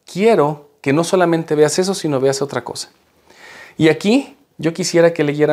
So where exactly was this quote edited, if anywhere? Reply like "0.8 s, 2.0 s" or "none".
none

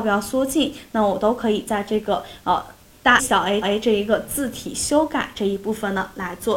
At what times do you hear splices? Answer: 3.2 s, 3.6 s

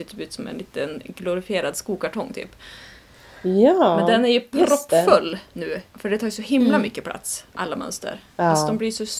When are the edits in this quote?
5.9 s

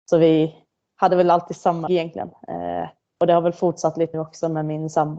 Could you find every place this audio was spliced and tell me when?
1.9 s, 3.0 s, 4.1 s

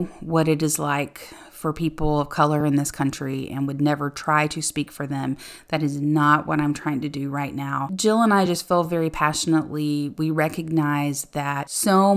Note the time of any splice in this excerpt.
none

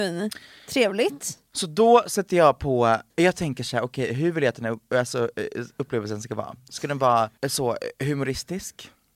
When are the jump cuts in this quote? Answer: 3.1 s, 7.4 s

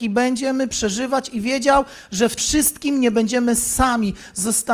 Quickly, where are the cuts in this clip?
2.4 s

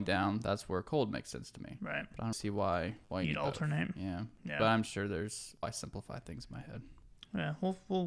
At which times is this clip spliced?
2.3 s, 3.0 s, 5.6 s

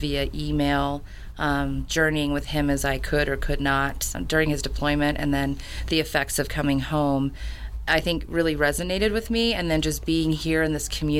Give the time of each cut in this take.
4.1 s

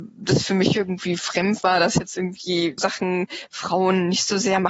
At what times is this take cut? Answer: 2.8 s

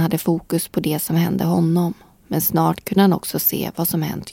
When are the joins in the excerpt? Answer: none

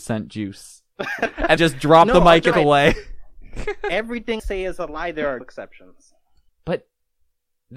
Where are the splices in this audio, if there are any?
1.6 s, 2.5 s, 4.4 s, 5.4 s, 6.5 s

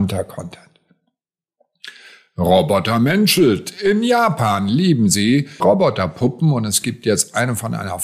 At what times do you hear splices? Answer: 5.6 s

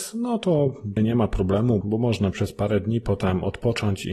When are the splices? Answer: 1.0 s, 1.8 s, 2.3 s

